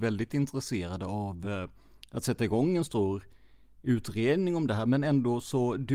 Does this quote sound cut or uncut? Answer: uncut